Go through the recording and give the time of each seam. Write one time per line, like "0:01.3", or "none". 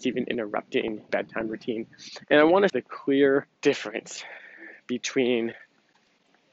0:01.1
0:02.7
0:03.6